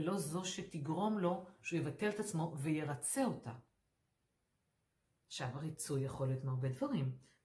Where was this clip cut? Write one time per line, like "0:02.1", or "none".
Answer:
none